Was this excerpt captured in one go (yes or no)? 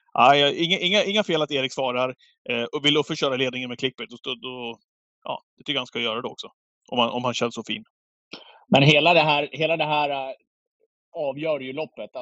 yes